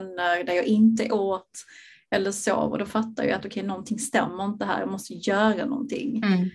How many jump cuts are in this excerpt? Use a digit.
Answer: 0